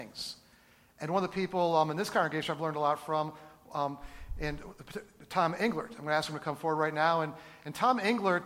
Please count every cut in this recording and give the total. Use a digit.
0